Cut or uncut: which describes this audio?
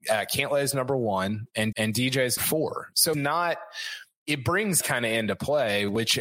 cut